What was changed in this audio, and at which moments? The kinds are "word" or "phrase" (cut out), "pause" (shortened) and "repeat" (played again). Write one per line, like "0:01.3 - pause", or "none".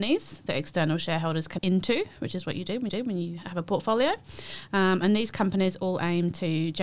0:01.6 - word
0:02.9 - repeat

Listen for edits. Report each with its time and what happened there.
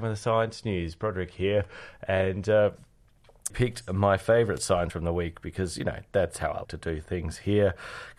0:03.5 - word
0:04.9 - word
0:06.6 - word

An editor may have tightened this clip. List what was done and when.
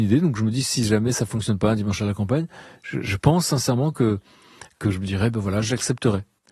none

